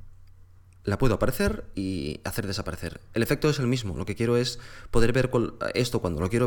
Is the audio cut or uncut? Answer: cut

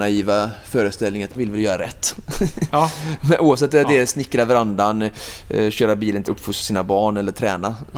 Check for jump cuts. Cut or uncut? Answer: cut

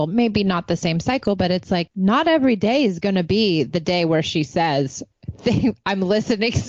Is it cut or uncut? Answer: uncut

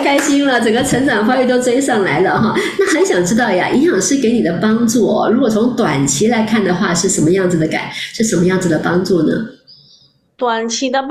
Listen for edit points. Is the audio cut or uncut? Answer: uncut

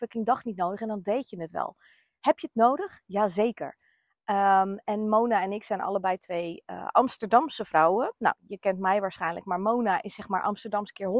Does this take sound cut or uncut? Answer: cut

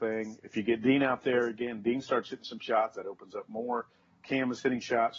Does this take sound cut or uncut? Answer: uncut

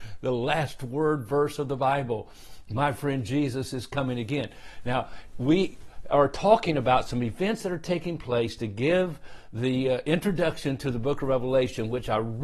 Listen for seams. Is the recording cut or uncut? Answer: uncut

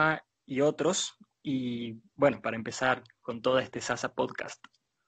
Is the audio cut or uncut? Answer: uncut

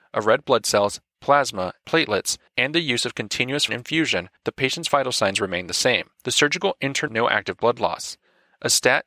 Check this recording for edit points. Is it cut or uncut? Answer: cut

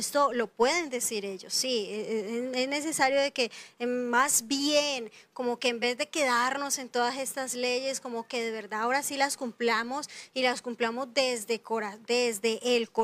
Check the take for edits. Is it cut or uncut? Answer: uncut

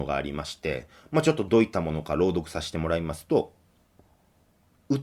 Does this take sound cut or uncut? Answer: uncut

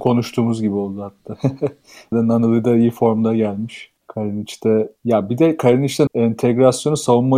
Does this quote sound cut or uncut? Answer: cut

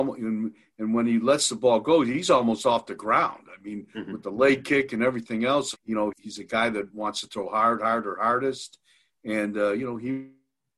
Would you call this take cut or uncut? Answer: cut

